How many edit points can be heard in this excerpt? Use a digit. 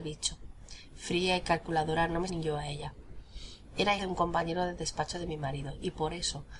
2